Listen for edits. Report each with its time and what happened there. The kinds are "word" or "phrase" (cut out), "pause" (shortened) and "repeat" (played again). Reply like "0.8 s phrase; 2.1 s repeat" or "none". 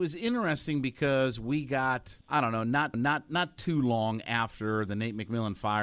2.2 s pause; 2.9 s repeat